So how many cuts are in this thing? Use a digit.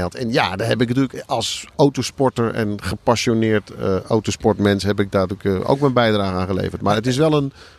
0